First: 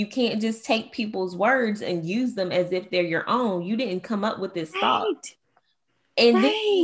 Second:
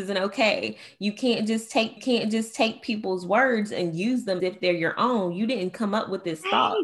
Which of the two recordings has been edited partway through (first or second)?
second